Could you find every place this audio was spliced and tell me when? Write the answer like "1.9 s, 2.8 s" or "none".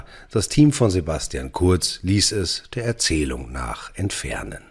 none